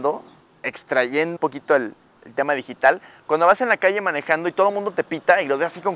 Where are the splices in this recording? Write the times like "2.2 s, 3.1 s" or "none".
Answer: 1.4 s